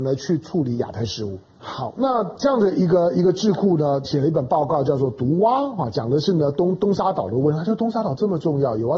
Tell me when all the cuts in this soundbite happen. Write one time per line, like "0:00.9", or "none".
0:01.5
0:04.0